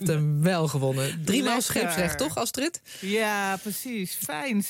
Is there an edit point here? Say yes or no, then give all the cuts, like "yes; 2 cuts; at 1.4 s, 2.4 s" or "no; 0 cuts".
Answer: no; 0 cuts